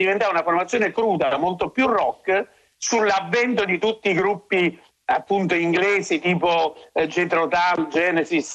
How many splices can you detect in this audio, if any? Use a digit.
0